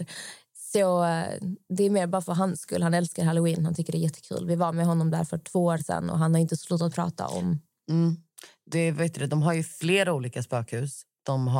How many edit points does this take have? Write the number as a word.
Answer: zero